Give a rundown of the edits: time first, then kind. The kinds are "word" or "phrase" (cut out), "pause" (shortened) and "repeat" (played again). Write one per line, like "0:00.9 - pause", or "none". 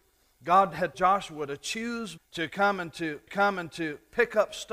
0:00.9 - word
0:02.2 - word
0:03.3 - repeat